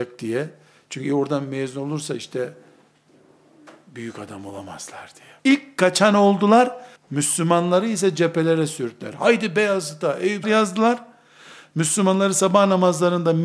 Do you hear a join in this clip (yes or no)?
yes